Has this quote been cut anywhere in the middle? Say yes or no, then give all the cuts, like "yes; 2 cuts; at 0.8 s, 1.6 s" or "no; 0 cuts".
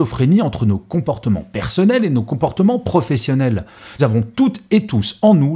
yes; 1 cut; at 4.0 s